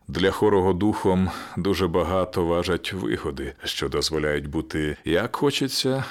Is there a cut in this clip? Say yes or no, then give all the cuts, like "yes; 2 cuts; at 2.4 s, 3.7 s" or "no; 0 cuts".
no; 0 cuts